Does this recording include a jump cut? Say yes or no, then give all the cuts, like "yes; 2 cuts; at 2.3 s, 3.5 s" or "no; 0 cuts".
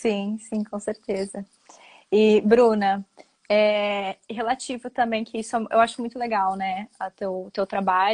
no; 0 cuts